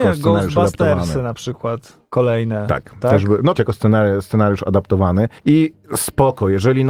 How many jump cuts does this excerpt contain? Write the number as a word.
two